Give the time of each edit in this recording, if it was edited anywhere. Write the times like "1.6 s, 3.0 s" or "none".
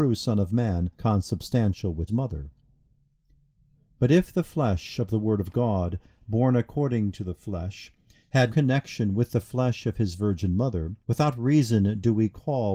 0.9 s, 2.1 s, 8.5 s, 11.0 s